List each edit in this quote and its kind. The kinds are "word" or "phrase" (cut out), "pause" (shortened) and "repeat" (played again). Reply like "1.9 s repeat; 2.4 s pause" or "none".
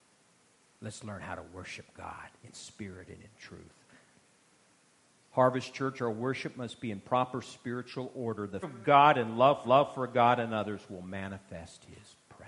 2.4 s pause; 8.6 s word; 9.6 s repeat

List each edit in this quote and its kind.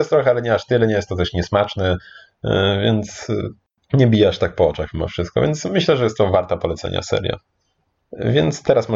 3.8 s pause

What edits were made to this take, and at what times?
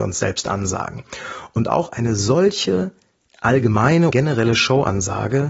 4.1 s word

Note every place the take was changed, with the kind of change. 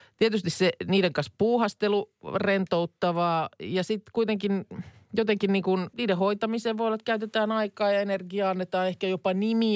5.9 s word

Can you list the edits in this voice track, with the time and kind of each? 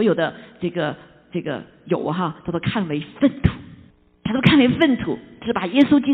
3.9 s pause

